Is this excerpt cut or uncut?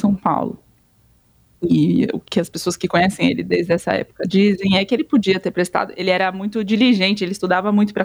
uncut